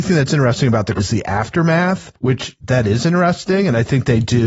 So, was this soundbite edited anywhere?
yes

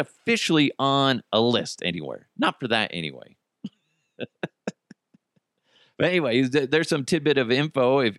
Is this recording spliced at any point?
no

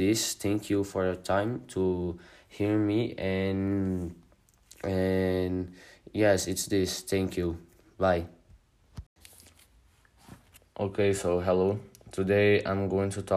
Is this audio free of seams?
yes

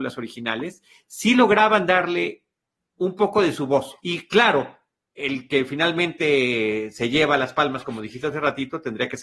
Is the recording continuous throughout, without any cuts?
yes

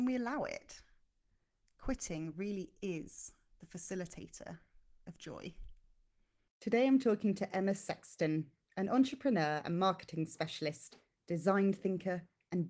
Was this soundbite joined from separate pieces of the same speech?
no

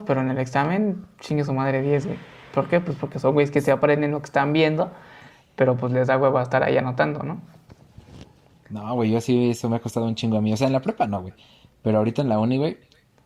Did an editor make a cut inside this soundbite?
no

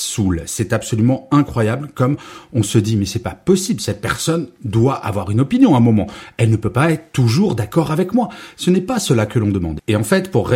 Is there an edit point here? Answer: no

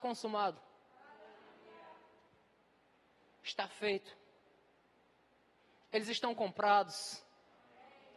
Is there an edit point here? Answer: no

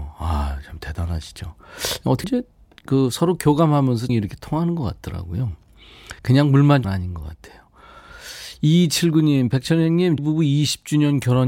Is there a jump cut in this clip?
yes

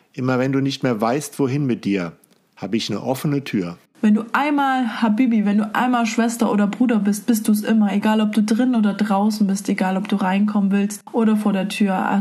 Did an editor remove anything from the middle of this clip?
no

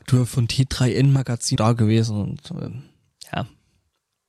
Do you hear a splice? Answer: yes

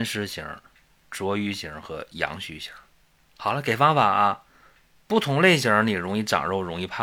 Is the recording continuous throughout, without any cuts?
yes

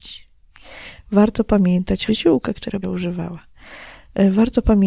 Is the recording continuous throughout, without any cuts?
no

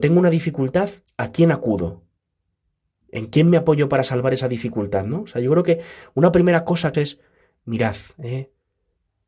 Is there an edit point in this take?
yes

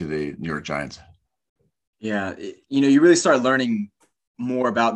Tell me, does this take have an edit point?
no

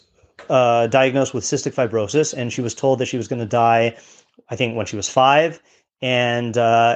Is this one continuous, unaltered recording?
yes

